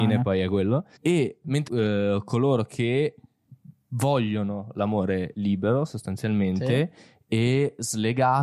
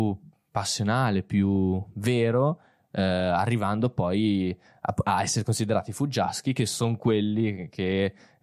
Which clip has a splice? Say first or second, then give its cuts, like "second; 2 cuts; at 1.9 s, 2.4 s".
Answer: first; 2 cuts; at 1.0 s, 1.7 s